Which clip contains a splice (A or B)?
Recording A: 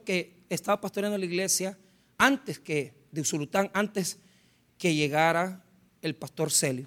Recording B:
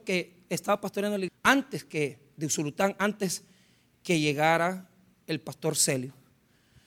B